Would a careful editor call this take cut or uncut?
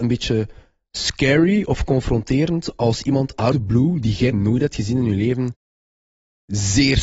cut